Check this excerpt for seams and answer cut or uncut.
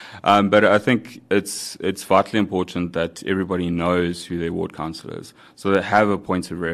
uncut